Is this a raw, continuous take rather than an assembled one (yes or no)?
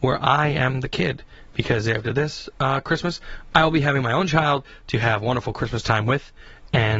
yes